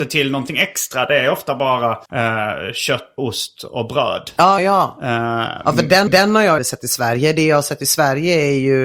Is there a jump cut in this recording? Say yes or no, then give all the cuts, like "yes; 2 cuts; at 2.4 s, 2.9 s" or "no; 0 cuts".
yes; 5 cuts; at 2.1 s, 3.2 s, 4.6 s, 6.1 s, 6.6 s